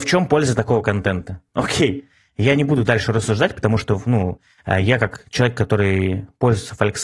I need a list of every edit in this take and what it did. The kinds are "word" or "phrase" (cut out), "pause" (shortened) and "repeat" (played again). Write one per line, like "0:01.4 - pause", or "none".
0:01.5 - pause